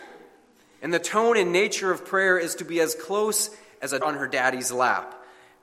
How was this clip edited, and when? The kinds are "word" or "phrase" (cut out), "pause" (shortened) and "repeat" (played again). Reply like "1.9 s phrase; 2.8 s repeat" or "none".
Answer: 4.0 s word